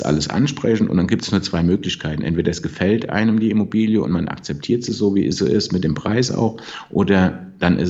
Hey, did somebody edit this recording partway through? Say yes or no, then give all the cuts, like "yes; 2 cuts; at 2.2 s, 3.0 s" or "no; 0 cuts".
no; 0 cuts